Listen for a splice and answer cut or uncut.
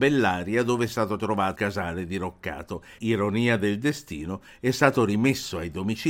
cut